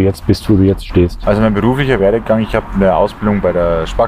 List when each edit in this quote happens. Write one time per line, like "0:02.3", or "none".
none